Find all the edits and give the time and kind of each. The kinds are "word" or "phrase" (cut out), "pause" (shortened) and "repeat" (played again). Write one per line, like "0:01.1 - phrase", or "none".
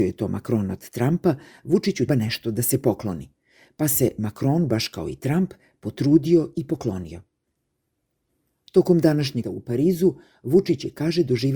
0:02.1 - word
0:09.4 - word